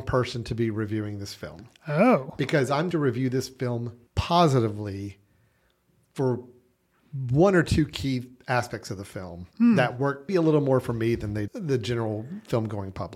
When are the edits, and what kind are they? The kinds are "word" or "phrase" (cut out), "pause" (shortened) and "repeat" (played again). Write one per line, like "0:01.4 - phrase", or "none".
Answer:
0:02.9 - word
0:04.1 - pause
0:10.3 - word
0:11.5 - word